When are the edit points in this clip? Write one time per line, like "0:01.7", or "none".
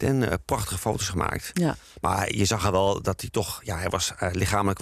none

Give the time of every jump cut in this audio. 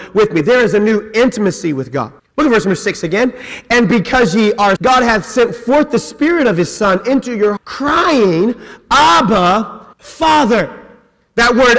0:02.2
0:04.8
0:07.6
0:09.9

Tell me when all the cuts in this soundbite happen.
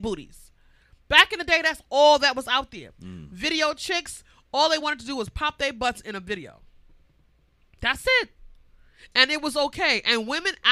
none

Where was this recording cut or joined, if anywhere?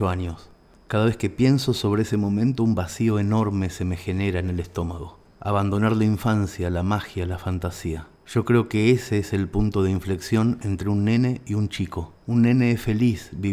0:08.1
0:12.2

